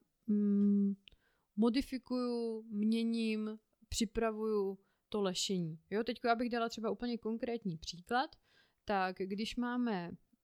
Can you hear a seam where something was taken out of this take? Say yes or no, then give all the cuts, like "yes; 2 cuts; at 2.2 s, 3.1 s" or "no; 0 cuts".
no; 0 cuts